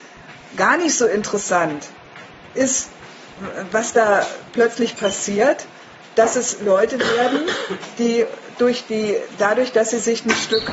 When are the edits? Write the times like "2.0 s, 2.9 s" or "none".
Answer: none